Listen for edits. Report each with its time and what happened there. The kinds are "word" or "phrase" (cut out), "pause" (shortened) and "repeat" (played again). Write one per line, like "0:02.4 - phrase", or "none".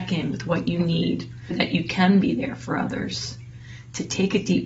0:01.5 - word